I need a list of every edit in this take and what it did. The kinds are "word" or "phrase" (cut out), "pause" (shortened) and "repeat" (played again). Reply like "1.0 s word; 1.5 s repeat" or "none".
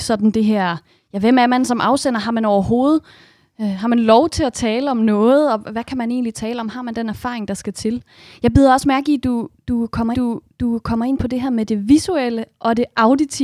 10.1 s repeat